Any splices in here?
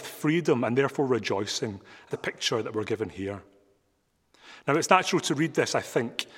yes; 1 cut; at 2.1 s

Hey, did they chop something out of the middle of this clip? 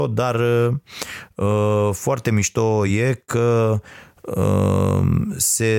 no; 0 cuts

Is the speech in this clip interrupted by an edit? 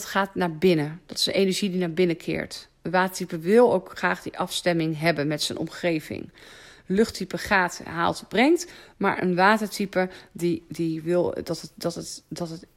no; 0 cuts

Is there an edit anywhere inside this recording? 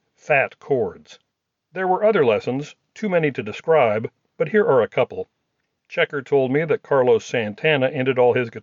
no; 0 cuts

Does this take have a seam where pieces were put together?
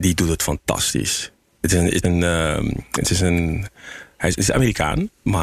yes; 1 cut; at 2.0 s

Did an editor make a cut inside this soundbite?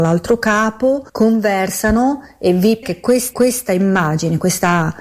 yes; 3 cuts; at 1.1 s, 2.8 s, 3.3 s

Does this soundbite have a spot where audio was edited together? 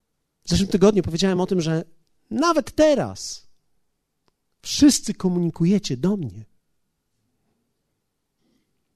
no; 0 cuts

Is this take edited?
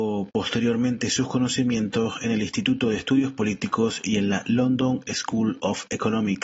no; 0 cuts

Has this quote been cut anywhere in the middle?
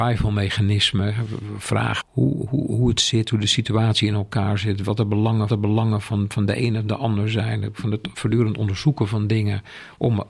yes; 2 cuts; at 2.0 s, 5.5 s

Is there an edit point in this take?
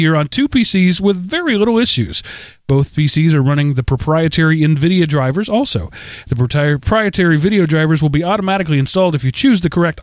no; 0 cuts

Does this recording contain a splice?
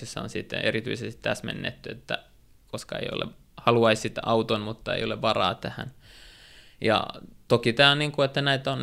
no; 0 cuts

